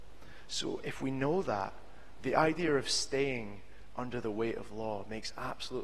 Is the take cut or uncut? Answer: uncut